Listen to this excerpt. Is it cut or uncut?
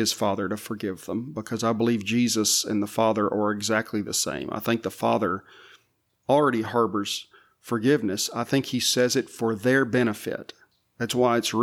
uncut